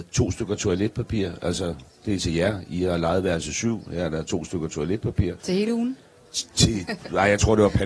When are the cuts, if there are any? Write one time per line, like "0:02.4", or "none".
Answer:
0:05.4